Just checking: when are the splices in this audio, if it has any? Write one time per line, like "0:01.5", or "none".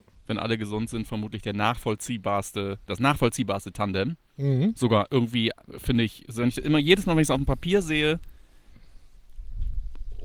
0:04.3